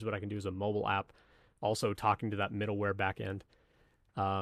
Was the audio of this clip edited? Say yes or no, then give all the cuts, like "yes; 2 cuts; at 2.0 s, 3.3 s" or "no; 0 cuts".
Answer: no; 0 cuts